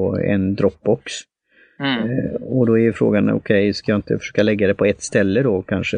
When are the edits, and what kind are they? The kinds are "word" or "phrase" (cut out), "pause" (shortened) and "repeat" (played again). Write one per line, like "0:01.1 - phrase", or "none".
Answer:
none